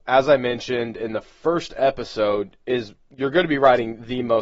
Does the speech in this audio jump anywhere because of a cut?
no; 0 cuts

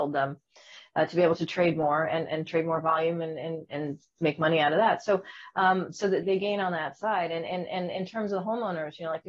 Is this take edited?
yes; 1 cut; at 6.2 s

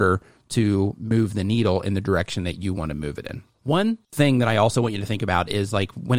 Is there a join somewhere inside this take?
no; 0 cuts

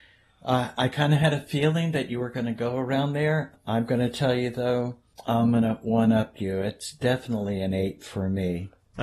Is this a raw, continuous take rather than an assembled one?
yes; 0 cuts

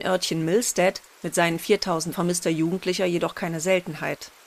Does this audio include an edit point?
yes; 1 cut; at 2.1 s

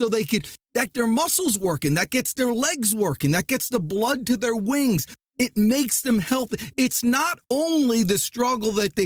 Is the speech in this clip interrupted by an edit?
yes; 2 cuts; at 0.9 s, 3.5 s

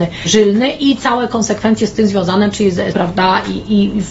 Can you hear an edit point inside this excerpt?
yes; 1 cut; at 2.9 s

